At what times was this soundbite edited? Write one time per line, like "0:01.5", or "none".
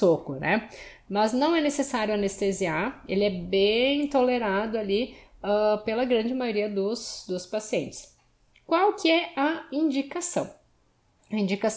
none